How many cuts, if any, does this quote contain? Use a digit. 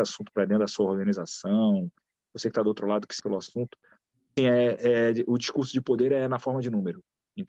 2